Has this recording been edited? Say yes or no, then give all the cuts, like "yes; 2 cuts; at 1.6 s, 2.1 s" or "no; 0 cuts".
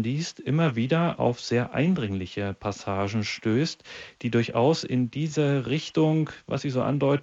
no; 0 cuts